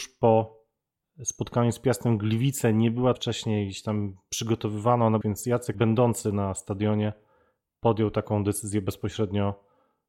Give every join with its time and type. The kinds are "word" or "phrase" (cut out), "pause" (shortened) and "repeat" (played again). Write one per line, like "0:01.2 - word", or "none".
0:03.1 - phrase
0:05.2 - phrase
0:05.7 - word